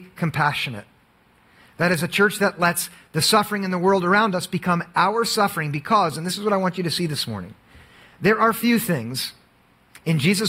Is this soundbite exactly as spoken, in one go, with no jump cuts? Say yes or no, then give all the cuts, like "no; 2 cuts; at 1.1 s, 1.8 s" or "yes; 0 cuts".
yes; 0 cuts